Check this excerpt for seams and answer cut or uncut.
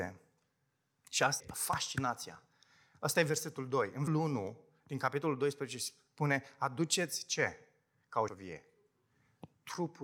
cut